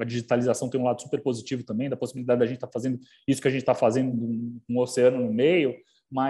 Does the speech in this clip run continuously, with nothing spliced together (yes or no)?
yes